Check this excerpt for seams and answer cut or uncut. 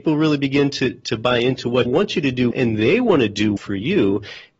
cut